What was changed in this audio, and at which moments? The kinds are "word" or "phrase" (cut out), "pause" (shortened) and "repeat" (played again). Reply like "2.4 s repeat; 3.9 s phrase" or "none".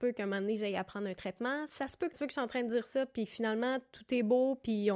2.1 s phrase